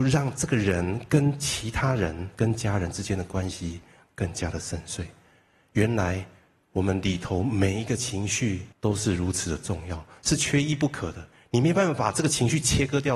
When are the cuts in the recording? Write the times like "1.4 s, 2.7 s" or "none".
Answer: 8.7 s